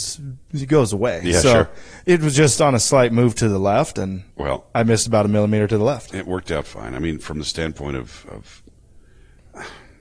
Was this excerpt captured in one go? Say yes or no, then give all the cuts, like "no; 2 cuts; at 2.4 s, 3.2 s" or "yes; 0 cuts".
no; 1 cut; at 4.3 s